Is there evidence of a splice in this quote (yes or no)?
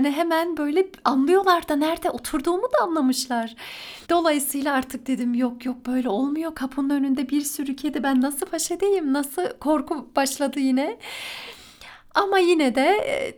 yes